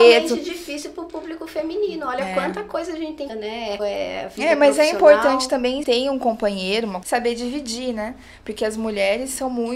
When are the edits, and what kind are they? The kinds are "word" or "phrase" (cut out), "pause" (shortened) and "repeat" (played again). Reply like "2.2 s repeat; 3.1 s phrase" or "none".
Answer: 3.3 s phrase; 3.8 s phrase; 5.8 s phrase; 7.0 s word